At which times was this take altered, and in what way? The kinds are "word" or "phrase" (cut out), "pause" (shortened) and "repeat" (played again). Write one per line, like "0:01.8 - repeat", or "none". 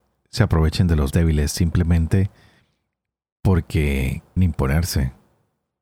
0:01.1 - word
0:04.4 - word